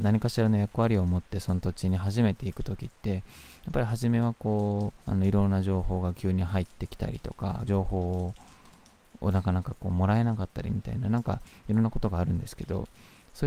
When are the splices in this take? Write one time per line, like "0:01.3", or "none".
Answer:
0:05.0
0:07.7

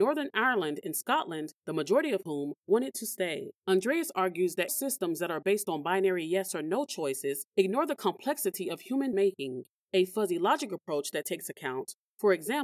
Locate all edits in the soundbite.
0:03.6
0:04.7
0:09.1

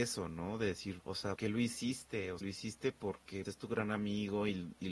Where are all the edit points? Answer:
0:01.0
0:01.4
0:02.4
0:03.5

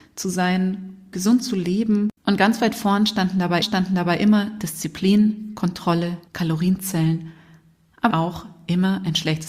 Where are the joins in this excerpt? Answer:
0:01.1
0:02.2
0:03.6
0:06.3
0:08.1

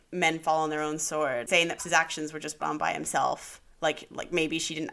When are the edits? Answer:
0:01.5
0:01.8
0:02.6

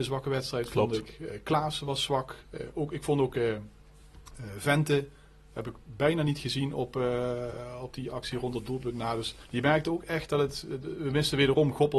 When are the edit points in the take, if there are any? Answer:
0:09.4

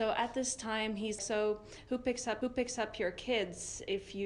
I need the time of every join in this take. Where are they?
0:01.2
0:02.4

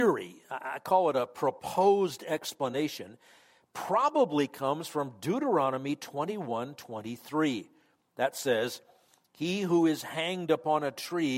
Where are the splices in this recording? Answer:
none

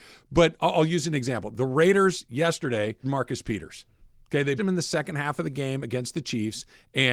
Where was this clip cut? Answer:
0:03.0
0:04.6

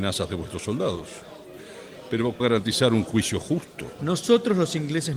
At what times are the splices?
0:02.4

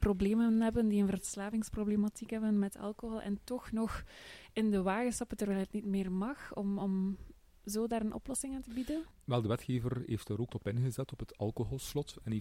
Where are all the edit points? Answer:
0:10.5

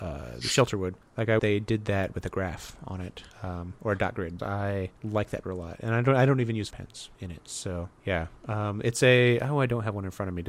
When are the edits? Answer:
0:01.0
0:01.4
0:03.3
0:04.4
0:05.0
0:05.4
0:06.7
0:07.1
0:08.0

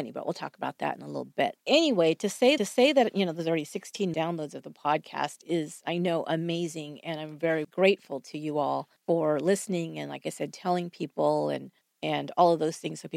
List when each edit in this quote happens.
0:01.6
0:02.6
0:04.1
0:07.6
0:09.0
0:11.8

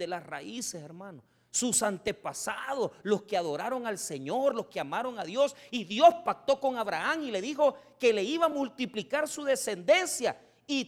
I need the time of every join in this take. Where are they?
none

